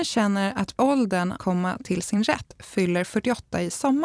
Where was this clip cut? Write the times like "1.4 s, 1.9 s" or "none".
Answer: 1.4 s